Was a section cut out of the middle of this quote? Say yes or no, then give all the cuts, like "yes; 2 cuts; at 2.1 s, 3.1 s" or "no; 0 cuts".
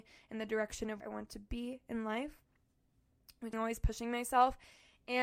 yes; 2 cuts; at 1.0 s, 3.5 s